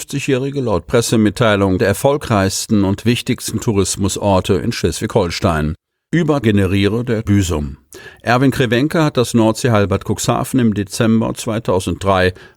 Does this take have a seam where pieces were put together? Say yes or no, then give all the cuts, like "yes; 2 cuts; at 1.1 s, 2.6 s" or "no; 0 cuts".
yes; 3 cuts; at 1.8 s, 6.4 s, 7.3 s